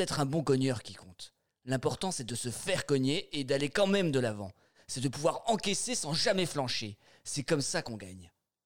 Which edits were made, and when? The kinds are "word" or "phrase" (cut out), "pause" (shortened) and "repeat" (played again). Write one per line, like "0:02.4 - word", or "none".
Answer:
none